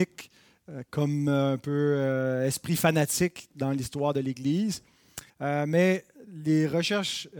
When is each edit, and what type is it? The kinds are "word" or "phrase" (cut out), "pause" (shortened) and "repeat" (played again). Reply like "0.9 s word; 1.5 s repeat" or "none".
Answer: 5.3 s pause